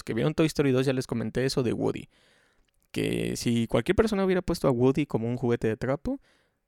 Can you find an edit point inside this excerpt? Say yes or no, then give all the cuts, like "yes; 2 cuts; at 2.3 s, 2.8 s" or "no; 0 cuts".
no; 0 cuts